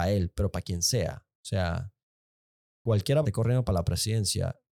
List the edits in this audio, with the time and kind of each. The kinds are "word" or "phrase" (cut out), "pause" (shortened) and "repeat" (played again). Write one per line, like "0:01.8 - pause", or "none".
0:03.2 - phrase

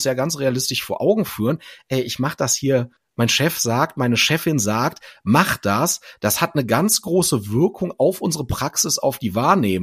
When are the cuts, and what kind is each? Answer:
0:03.0 - pause

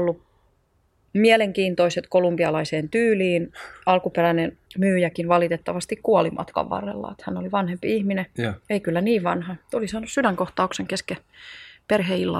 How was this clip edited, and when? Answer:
0:04.7 - pause

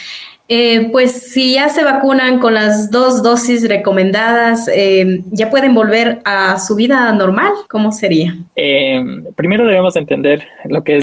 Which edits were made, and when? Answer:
0:07.7 - pause
0:08.5 - pause

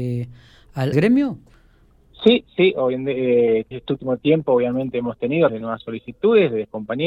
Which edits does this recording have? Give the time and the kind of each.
0:00.9 - word
0:03.7 - word
0:05.5 - word

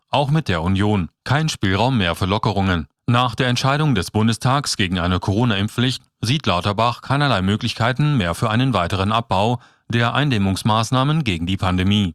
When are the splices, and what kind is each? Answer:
0:01.1 - pause
0:03.0 - pause

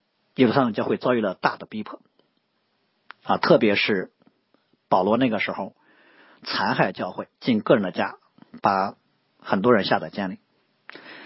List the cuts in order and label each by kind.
0:07.3 - pause

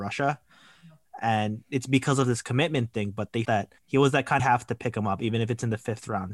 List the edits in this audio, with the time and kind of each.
0:03.4 - word
0:03.8 - pause
0:04.4 - phrase

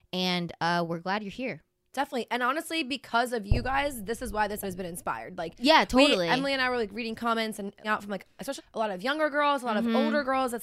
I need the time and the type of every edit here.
0:04.6 - word
0:07.8 - word
0:08.6 - word

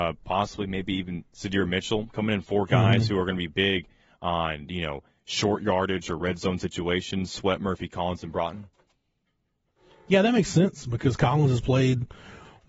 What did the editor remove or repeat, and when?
none

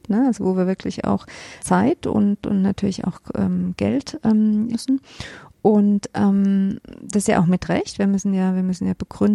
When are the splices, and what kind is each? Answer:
0:01.6 - word
0:04.7 - word

